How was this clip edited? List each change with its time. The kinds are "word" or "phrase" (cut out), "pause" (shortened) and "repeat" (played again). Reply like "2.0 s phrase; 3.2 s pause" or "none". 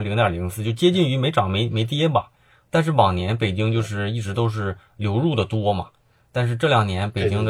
none